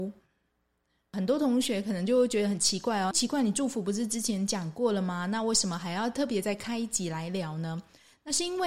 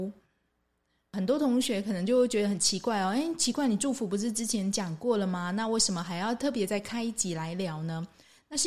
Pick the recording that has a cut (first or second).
first